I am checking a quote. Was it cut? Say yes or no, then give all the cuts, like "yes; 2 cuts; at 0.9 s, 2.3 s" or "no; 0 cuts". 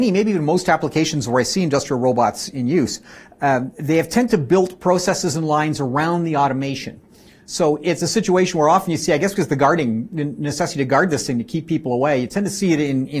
no; 0 cuts